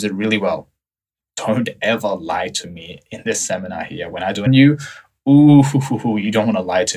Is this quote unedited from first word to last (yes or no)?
no